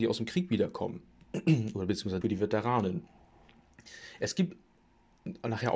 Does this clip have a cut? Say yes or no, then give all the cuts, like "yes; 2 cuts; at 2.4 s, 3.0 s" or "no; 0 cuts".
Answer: yes; 1 cut; at 2.2 s